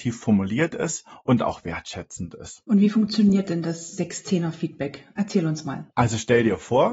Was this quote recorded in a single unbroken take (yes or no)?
no